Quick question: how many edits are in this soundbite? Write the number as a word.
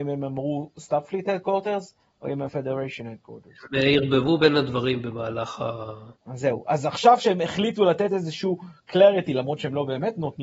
two